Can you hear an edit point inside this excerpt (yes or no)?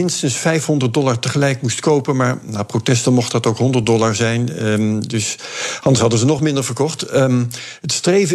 no